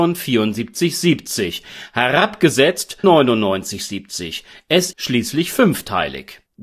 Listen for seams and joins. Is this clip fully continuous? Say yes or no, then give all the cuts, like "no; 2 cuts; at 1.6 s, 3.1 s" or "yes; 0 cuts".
no; 2 cuts; at 3.0 s, 4.9 s